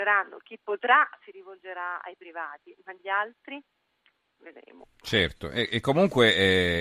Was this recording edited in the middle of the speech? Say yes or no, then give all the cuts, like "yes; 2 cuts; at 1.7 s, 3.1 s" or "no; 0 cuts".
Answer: no; 0 cuts